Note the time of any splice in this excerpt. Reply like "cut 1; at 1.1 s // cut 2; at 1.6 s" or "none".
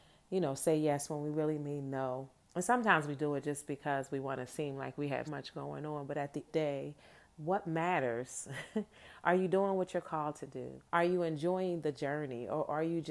cut 1; at 2.4 s // cut 2; at 5.3 s // cut 3; at 6.5 s // cut 4; at 10.9 s